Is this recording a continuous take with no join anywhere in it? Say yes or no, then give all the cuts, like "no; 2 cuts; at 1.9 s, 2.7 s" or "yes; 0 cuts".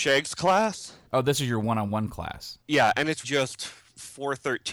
no; 3 cuts; at 1.1 s, 2.6 s, 3.2 s